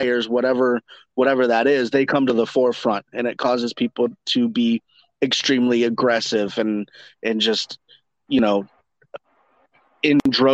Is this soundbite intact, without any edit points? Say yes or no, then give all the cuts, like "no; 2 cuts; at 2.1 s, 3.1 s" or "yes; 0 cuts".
yes; 0 cuts